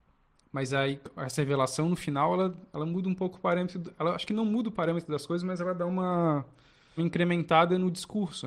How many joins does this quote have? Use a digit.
1